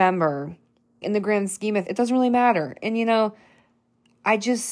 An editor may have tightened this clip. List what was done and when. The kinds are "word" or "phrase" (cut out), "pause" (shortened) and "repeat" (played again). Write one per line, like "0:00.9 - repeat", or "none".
0:01.0 - word
0:01.9 - word